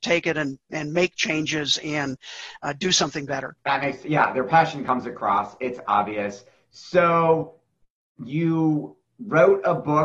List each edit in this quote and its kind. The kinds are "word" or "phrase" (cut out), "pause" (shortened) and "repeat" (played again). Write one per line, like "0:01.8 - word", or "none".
none